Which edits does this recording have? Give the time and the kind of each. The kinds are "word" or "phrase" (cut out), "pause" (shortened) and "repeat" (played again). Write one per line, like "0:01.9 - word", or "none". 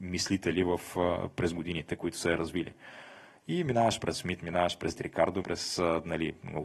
0:04.1 - word
0:05.0 - word
0:05.4 - word